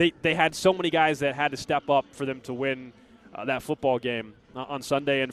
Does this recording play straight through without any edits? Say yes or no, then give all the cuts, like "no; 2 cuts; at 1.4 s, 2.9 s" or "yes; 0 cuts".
yes; 0 cuts